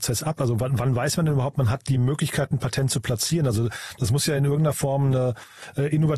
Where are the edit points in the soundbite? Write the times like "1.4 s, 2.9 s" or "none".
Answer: none

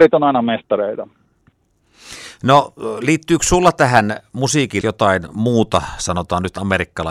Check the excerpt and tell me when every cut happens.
4.8 s

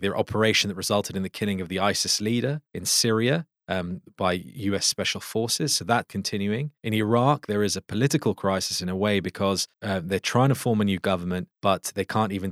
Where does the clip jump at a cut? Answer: 2.7 s, 3.6 s, 6.0 s, 6.8 s, 9.7 s, 11.5 s

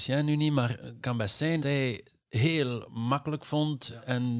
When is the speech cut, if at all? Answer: 1.0 s, 1.6 s, 2.3 s

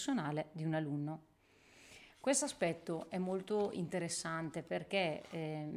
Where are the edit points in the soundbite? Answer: none

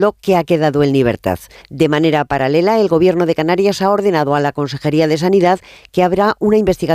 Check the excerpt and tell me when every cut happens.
1.6 s

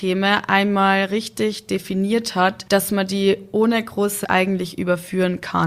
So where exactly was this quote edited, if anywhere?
4.2 s

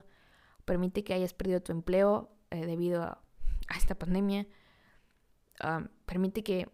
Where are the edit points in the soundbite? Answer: none

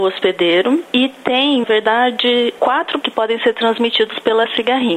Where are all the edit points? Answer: 1.6 s, 3.0 s

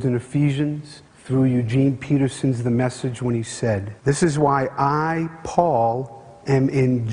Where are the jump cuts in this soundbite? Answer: 1.1 s, 4.0 s

